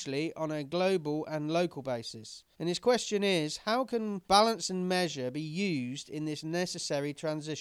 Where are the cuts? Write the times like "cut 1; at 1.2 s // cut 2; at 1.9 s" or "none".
cut 1; at 2.5 s // cut 2; at 4.2 s